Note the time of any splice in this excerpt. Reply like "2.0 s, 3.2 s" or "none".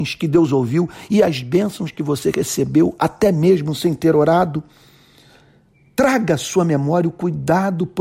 none